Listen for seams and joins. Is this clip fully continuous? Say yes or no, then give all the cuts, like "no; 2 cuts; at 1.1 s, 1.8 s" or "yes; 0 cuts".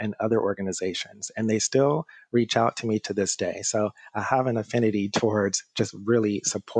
yes; 0 cuts